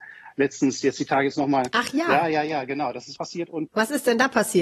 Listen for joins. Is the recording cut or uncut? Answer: cut